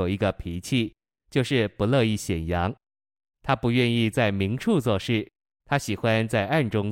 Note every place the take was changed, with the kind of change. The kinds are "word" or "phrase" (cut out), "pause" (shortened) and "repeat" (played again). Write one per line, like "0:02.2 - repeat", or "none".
none